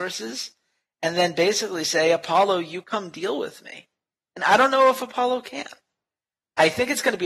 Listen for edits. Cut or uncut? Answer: uncut